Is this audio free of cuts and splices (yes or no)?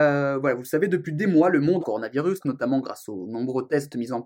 no